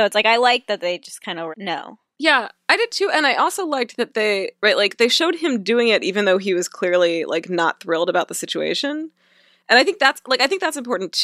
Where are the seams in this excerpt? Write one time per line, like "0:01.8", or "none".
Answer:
0:01.5